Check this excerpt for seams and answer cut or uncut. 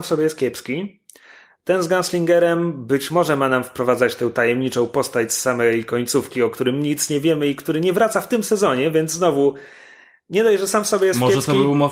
uncut